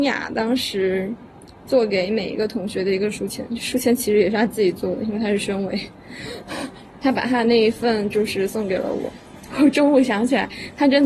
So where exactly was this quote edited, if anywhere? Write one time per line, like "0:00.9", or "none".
none